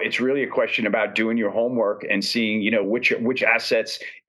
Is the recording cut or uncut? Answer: uncut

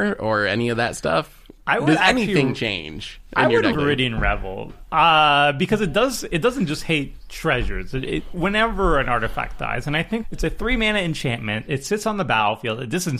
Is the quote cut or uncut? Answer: cut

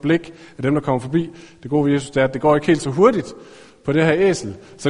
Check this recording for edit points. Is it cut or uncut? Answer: uncut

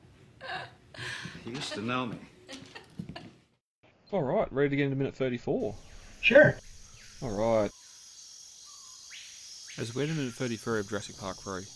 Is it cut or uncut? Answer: uncut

